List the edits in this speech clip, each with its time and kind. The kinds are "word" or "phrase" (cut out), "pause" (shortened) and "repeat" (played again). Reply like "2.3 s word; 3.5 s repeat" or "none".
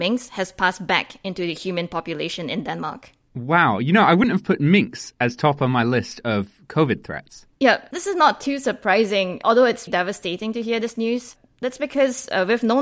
3.2 s pause; 7.5 s pause; 9.9 s word